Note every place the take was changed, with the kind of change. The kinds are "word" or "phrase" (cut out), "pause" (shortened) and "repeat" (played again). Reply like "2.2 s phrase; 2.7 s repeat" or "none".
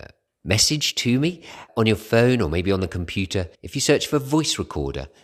1.7 s word; 3.5 s pause